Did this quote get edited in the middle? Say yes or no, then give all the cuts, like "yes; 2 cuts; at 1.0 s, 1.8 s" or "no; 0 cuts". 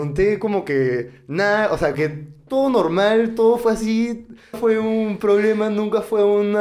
yes; 2 cuts; at 1.9 s, 4.5 s